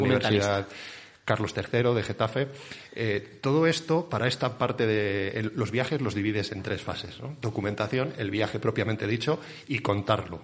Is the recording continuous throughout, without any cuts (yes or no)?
yes